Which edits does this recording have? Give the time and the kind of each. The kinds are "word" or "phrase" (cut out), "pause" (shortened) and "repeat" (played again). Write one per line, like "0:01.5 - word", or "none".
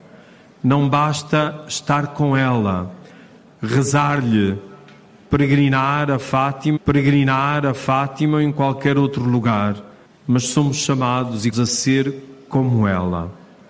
0:06.8 - repeat
0:10.0 - pause
0:11.5 - word